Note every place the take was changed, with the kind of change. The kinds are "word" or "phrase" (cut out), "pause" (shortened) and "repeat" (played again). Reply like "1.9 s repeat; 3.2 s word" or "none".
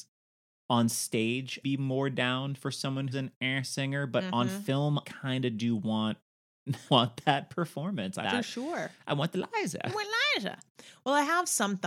1.6 s word; 3.1 s word; 5.0 s word; 6.9 s word; 8.2 s word